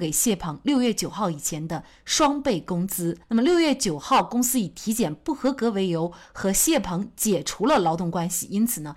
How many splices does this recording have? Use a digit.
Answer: 1